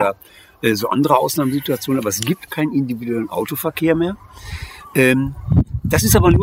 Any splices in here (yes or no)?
yes